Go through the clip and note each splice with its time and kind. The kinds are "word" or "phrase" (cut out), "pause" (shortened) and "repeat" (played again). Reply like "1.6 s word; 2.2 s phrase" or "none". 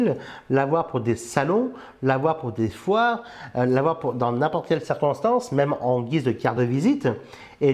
none